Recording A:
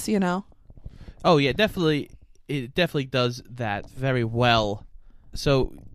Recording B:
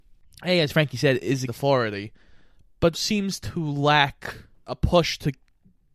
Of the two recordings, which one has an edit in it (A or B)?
B